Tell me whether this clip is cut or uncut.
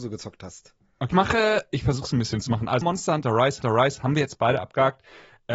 cut